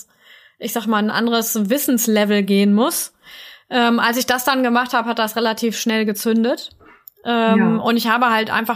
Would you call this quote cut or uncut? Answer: uncut